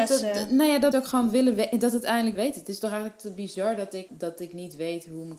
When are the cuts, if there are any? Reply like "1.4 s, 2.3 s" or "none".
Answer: 0.9 s, 2.3 s, 4.1 s